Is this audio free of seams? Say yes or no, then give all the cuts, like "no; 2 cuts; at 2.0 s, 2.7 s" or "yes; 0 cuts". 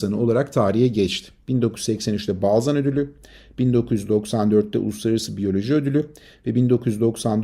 yes; 0 cuts